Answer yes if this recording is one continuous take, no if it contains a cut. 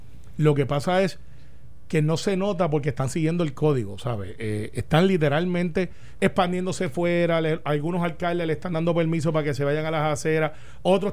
yes